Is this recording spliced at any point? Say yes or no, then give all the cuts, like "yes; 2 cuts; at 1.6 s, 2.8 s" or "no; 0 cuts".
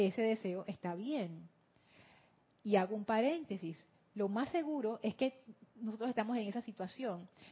no; 0 cuts